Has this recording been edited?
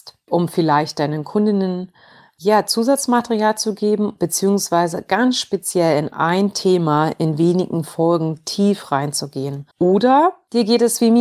yes; 1 cut; at 9.7 s

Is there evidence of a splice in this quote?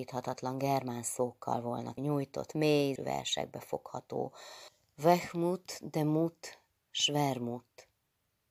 yes; 2 cuts; at 2.0 s, 3.0 s

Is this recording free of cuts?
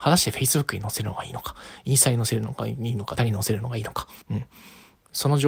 no; 2 cuts; at 3.2 s, 4.2 s

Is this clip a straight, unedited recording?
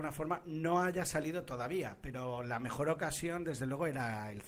yes; 0 cuts

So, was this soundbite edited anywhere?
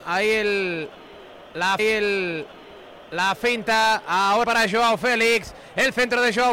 yes; 2 cuts; at 1.8 s, 4.4 s

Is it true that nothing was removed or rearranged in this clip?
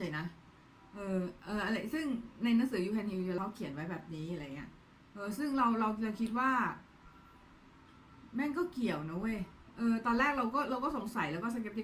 no; 1 cut; at 3.4 s

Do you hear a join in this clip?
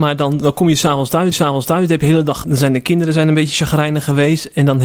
yes; 2 cuts; at 1.3 s, 2.4 s

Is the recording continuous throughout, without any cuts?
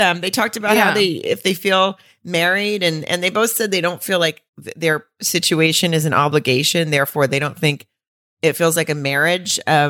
no; 1 cut; at 4.5 s

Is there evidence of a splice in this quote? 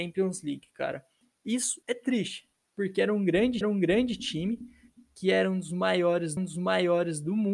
yes; 3 cuts; at 1.8 s, 3.6 s, 6.4 s

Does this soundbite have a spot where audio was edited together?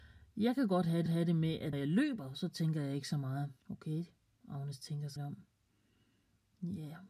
yes; 4 cuts; at 1.1 s, 1.7 s, 3.6 s, 5.2 s

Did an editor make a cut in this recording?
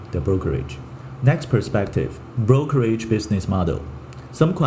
no; 0 cuts

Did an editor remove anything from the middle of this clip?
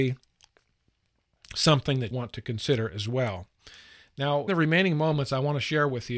yes; 2 cuts; at 2.1 s, 4.5 s

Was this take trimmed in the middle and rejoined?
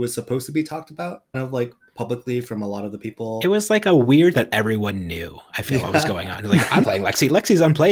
yes; 4 cuts; at 1.3 s, 4.3 s, 5.8 s, 6.8 s

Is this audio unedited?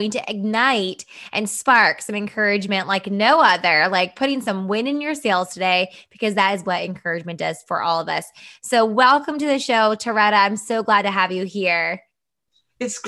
yes; 0 cuts

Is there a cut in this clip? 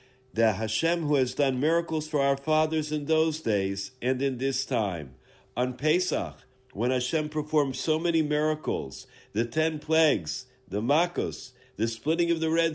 no; 0 cuts

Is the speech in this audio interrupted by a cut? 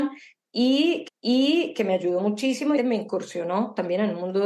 yes; 2 cuts; at 1.1 s, 2.8 s

